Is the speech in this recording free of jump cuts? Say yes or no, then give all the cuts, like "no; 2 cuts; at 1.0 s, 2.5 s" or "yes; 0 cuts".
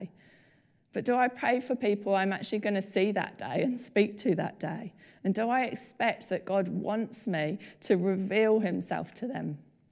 yes; 0 cuts